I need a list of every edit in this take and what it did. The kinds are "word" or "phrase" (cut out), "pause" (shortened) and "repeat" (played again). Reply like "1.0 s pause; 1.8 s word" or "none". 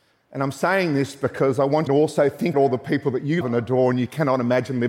1.9 s phrase; 2.5 s word; 3.4 s word